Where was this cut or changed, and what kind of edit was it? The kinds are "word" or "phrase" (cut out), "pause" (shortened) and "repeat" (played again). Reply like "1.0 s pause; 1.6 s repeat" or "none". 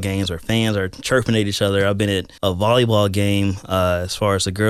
2.4 s pause